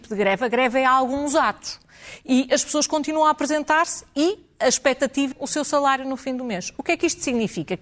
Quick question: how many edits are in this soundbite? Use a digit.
1